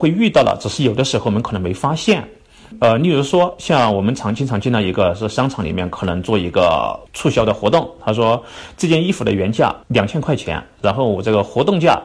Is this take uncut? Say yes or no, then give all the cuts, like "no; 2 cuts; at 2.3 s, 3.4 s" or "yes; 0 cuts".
no; 1 cut; at 9.8 s